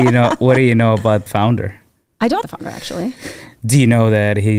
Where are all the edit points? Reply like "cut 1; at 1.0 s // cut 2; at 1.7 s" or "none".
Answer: cut 1; at 1.3 s // cut 2; at 2.4 s